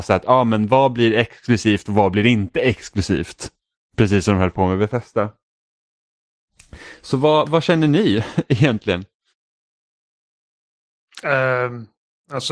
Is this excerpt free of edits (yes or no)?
yes